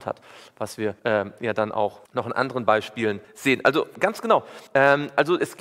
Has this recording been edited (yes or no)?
yes